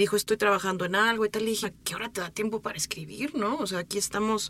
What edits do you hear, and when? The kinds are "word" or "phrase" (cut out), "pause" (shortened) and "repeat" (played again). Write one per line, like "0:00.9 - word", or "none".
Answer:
0:01.6 - word